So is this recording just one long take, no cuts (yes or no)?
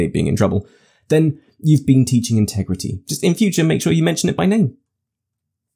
yes